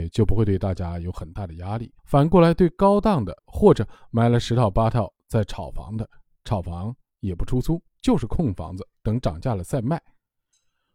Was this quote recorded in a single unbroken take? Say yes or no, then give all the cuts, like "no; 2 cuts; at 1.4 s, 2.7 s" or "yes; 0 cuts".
no; 2 cuts; at 2.0 s, 3.4 s